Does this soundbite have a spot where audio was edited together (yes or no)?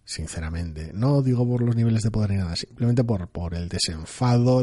no